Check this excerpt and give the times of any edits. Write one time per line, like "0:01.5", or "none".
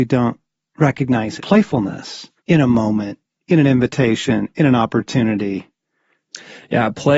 0:01.4
0:02.4